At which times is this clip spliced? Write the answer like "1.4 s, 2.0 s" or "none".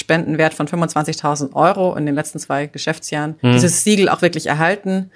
3.4 s

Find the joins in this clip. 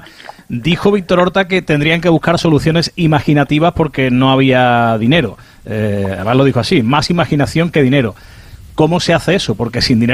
none

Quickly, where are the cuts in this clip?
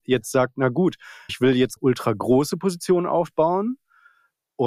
1.3 s, 1.8 s

